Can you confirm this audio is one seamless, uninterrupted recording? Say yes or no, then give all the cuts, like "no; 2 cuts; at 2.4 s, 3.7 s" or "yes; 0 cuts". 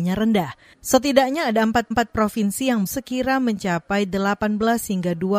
no; 2 cuts; at 1.9 s, 2.9 s